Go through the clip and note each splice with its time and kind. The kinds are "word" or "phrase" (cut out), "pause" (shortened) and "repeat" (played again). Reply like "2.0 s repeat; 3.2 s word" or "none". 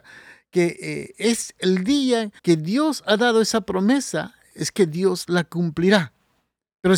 2.4 s pause

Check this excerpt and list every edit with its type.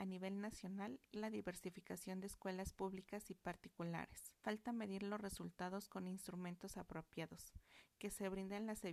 1.1 s phrase; 4.4 s pause

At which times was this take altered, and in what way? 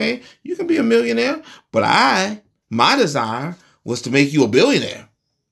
none

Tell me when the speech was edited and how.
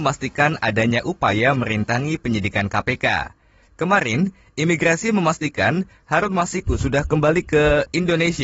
none

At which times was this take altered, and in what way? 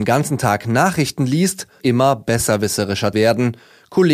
1.8 s word; 3.1 s word

